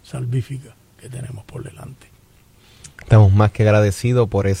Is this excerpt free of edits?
yes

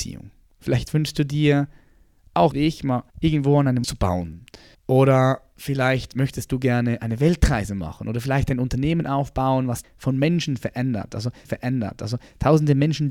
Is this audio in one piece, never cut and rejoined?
no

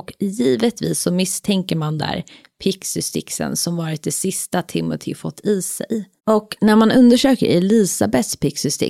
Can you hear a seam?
yes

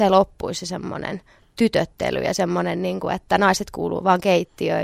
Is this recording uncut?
yes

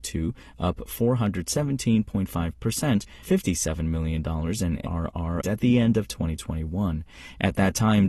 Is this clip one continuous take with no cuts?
no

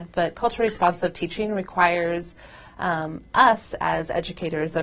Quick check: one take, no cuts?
yes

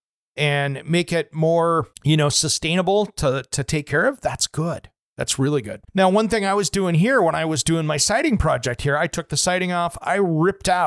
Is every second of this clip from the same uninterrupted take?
no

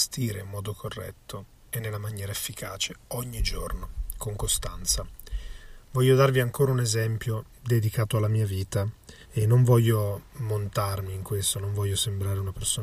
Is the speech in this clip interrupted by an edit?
yes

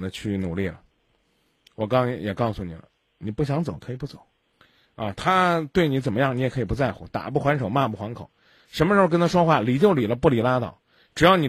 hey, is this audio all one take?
yes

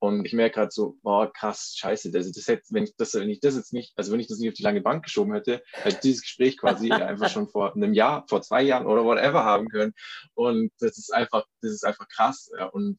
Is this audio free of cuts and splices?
yes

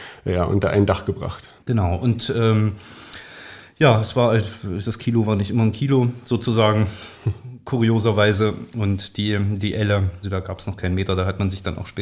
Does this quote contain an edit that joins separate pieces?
yes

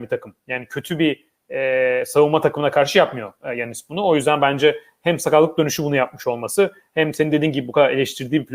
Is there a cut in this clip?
no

